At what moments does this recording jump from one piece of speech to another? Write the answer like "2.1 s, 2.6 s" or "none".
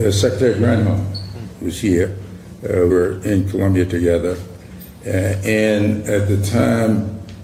2.9 s